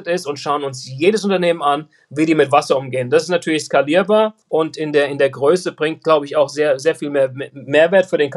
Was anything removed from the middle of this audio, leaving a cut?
yes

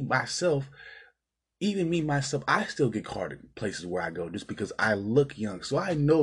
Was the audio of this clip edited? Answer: no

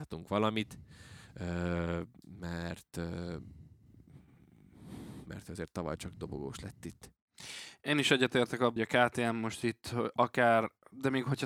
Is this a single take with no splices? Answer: no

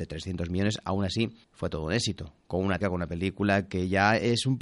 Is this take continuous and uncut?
no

